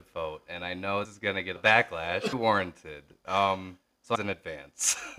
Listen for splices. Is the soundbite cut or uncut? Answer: cut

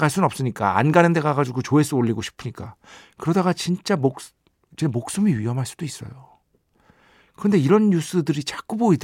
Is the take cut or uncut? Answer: uncut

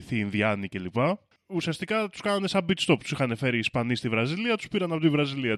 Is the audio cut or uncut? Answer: uncut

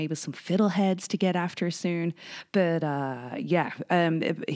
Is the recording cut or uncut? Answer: uncut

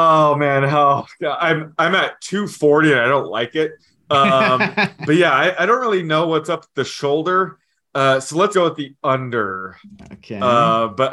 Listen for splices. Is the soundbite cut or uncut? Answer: cut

